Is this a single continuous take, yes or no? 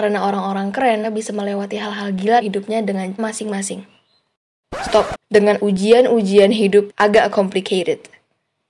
no